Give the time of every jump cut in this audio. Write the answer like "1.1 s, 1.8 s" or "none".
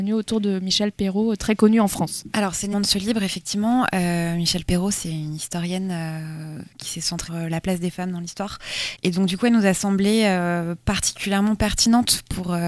2.7 s, 7.3 s